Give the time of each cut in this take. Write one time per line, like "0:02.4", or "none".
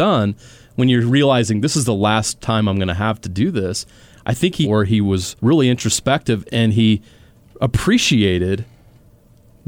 0:04.6
0:05.4